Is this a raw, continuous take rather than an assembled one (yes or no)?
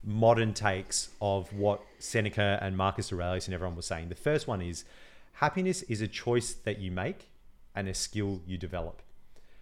yes